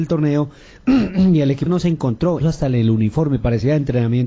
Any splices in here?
yes; 2 cuts; at 1.7 s, 2.4 s

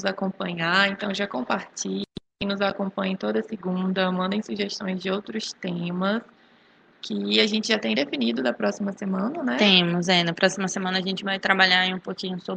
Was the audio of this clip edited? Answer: no; 0 cuts

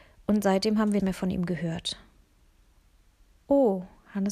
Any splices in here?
yes; 1 cut; at 1.0 s

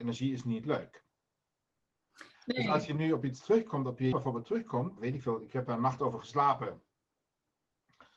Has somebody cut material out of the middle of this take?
yes; 3 cuts; at 2.3 s, 4.1 s, 5.0 s

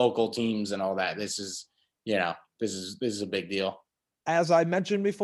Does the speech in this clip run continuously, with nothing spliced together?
yes; 0 cuts

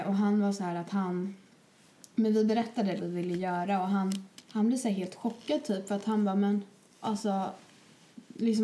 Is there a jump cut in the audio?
yes; 3 cuts; at 3.0 s, 4.4 s, 7.0 s

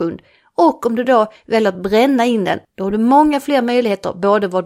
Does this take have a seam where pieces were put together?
no; 0 cuts

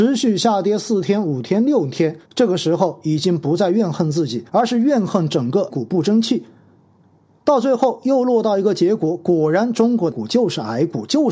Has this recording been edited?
yes; 4 cuts; at 2.2 s, 4.5 s, 5.7 s, 10.1 s

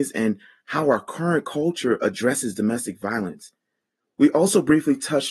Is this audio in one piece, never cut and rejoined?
yes; 0 cuts

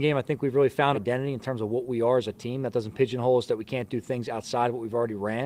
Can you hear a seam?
yes; 1 cut; at 0.9 s

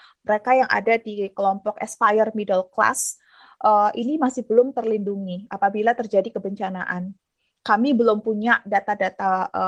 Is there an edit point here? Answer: no; 0 cuts

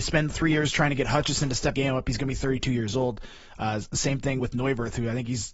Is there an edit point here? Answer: yes; 2 cuts; at 1.7 s, 4.4 s

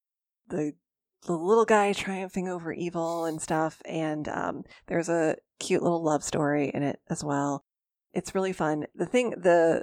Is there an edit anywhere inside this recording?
no; 0 cuts

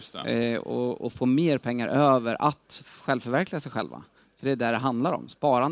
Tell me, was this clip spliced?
no; 0 cuts

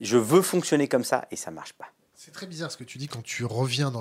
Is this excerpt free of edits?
yes; 0 cuts

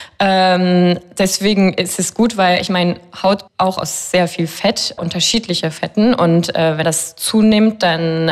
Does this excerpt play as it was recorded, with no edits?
no; 3 cuts; at 3.5 s, 5.0 s, 6.8 s

